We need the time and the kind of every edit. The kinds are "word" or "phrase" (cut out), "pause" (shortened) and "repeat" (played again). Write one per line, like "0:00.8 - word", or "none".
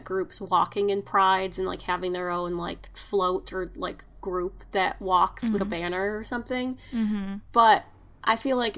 0:05.6 - word